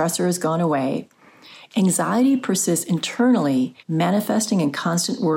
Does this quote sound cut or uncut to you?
cut